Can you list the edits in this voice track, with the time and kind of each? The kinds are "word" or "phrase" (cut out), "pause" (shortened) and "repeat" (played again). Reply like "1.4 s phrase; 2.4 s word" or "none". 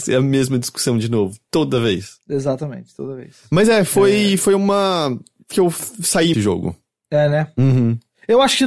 5.5 s phrase; 6.3 s phrase